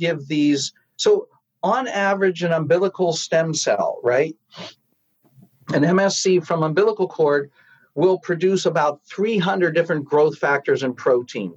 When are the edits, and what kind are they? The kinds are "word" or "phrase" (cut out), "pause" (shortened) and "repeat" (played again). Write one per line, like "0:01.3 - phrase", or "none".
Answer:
none